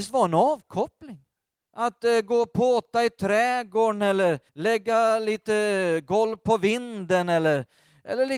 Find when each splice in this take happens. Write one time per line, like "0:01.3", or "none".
0:01.5
0:04.5